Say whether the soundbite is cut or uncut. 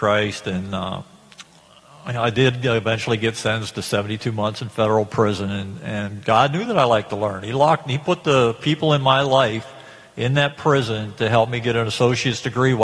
uncut